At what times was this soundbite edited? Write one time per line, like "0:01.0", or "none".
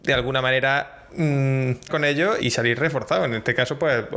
0:01.9
0:02.4